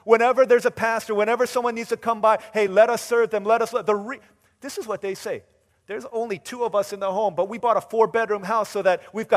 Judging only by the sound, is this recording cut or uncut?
uncut